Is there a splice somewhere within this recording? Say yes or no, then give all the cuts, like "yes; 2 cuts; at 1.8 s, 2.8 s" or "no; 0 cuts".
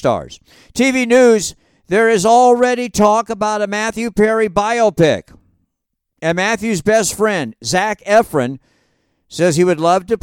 no; 0 cuts